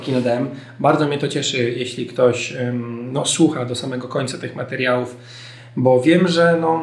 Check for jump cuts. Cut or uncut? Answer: uncut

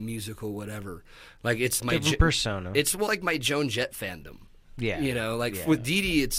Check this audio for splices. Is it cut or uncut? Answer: cut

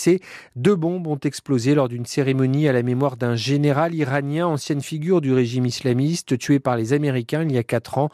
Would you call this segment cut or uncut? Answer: uncut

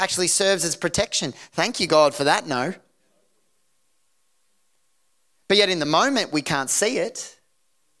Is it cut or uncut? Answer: uncut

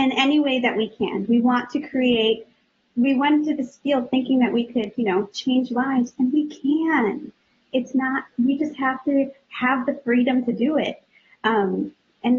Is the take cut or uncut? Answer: uncut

